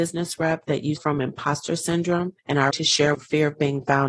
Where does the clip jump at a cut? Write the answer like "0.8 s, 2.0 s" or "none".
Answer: 1.0 s, 2.4 s, 2.7 s, 3.1 s